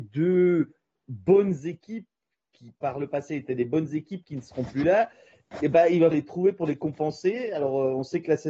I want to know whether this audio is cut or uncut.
cut